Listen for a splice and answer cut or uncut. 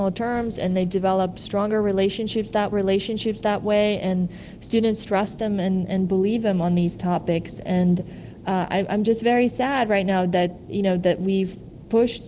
cut